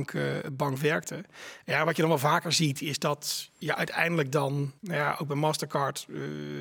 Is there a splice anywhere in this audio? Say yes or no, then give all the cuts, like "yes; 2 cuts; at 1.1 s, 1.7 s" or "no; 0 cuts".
yes; 1 cut; at 4.8 s